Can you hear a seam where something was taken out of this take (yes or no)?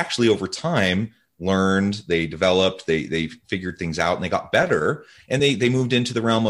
no